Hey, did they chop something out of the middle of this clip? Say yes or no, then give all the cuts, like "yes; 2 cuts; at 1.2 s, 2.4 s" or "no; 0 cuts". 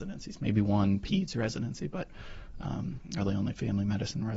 no; 0 cuts